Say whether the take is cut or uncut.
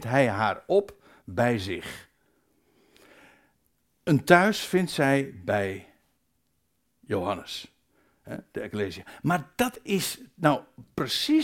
uncut